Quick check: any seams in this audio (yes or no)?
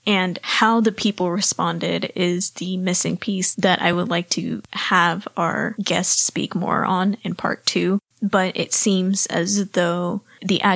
no